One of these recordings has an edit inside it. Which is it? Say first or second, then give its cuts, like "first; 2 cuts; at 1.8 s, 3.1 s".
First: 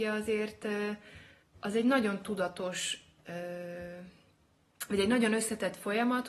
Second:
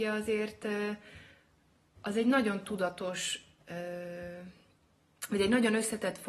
first; 1 cut; at 1.4 s